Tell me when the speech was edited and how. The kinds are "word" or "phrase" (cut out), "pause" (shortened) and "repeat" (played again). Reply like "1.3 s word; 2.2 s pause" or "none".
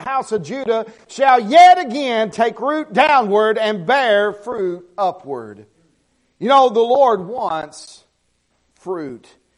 none